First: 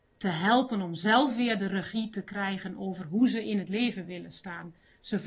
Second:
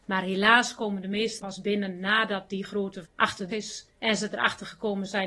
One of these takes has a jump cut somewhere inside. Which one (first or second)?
second